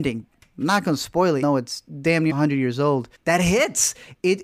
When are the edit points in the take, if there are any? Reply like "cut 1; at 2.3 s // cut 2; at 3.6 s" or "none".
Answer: cut 1; at 1.4 s // cut 2; at 2.3 s // cut 3; at 3.1 s